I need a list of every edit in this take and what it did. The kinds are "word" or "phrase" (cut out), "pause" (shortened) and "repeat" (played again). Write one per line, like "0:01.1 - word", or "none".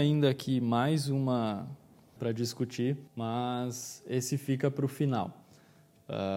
0:02.2 - phrase
0:03.1 - pause